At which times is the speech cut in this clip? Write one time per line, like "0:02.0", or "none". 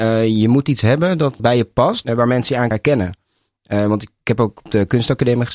0:02.7